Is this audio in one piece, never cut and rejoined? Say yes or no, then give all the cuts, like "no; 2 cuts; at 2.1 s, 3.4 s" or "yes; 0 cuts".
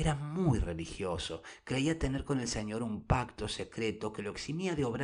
yes; 0 cuts